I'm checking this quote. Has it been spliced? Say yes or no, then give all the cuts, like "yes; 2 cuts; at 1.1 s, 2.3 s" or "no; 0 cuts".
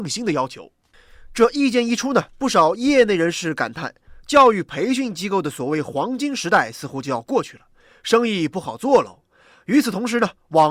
yes; 1 cut; at 2.3 s